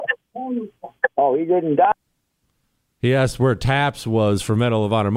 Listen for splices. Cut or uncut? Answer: uncut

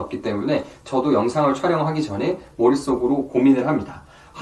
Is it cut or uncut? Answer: uncut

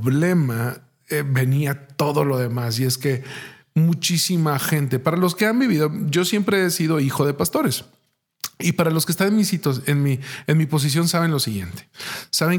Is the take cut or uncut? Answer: uncut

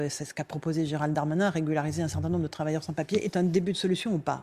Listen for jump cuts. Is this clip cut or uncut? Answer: uncut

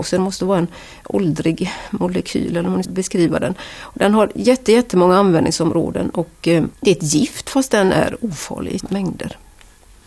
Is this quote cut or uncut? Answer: cut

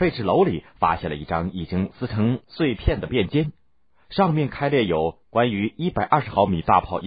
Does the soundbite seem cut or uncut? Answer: cut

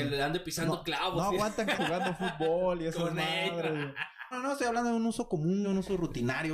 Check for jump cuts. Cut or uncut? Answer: cut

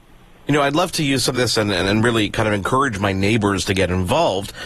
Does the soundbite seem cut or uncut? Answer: cut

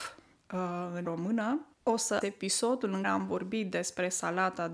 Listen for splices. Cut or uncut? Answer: cut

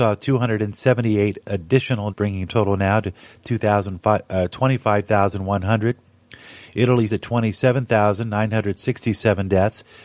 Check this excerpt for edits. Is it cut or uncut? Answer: cut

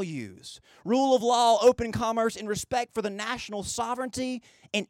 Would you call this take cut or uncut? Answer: uncut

